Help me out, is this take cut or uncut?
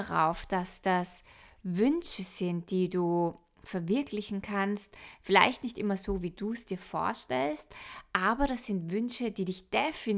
uncut